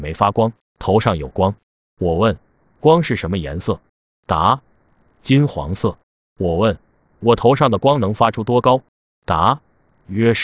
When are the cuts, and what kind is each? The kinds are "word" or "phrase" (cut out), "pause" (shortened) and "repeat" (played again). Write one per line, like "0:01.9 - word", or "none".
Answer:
none